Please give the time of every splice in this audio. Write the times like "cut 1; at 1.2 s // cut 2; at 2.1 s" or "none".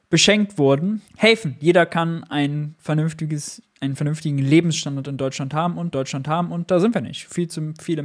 cut 1; at 1.1 s // cut 2; at 5.9 s